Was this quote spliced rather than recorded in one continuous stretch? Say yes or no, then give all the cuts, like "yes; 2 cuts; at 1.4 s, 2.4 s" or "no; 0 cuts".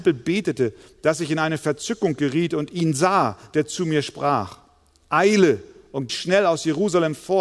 yes; 1 cut; at 6.1 s